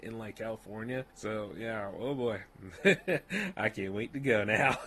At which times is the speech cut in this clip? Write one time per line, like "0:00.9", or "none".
0:01.1